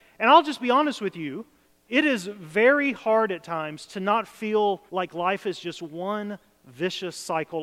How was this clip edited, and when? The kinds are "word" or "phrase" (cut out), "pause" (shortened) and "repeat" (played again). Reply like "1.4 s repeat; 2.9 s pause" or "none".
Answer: 1.6 s pause; 4.9 s pause